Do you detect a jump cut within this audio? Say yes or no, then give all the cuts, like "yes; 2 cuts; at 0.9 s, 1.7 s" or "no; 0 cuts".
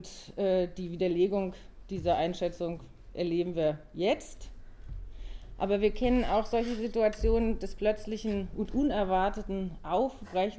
no; 0 cuts